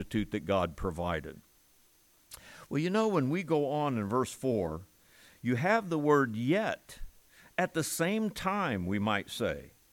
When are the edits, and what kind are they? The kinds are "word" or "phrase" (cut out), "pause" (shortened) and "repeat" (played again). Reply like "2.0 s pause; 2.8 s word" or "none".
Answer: none